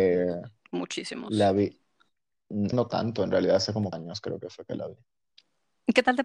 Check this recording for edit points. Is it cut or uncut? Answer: cut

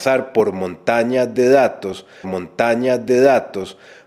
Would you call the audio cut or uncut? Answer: cut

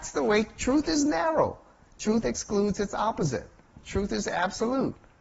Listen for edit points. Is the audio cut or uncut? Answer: uncut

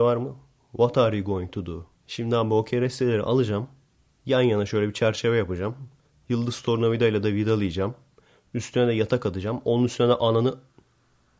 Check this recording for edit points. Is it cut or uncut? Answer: cut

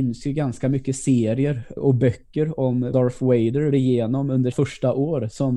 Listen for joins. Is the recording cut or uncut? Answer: cut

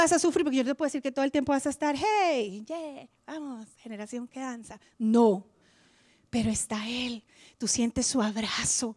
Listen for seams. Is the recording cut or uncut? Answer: uncut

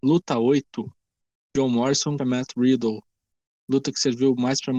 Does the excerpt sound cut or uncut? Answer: cut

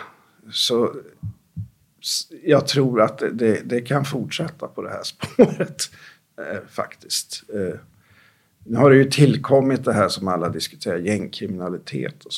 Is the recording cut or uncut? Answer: uncut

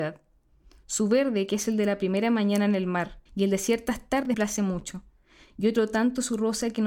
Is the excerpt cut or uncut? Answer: cut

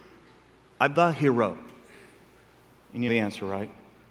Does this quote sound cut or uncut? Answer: cut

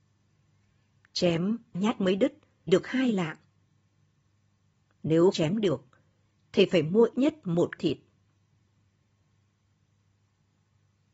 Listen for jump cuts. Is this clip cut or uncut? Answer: cut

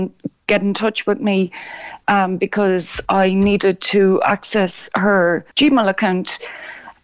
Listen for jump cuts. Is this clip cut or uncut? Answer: cut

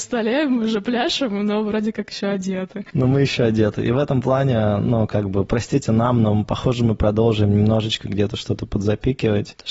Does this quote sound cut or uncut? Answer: uncut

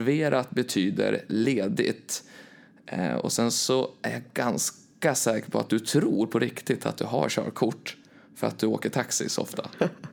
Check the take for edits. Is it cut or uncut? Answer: uncut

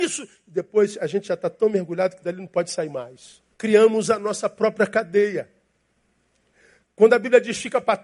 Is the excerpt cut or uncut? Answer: cut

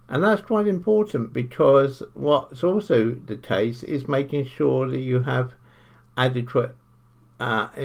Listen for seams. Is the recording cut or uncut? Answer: uncut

